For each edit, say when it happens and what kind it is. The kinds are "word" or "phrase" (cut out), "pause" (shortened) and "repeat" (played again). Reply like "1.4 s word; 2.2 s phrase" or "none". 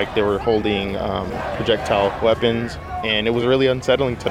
none